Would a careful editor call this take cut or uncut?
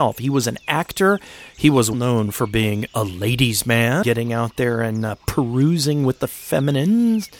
cut